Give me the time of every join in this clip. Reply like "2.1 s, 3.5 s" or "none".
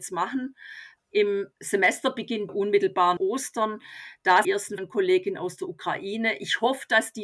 1.5 s, 2.5 s, 3.2 s, 4.4 s, 4.8 s